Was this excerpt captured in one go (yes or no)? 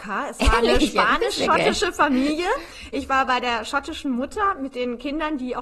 yes